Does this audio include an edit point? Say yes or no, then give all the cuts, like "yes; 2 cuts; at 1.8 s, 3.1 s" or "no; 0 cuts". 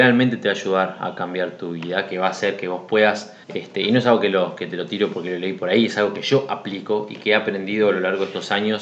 yes; 1 cut; at 3.4 s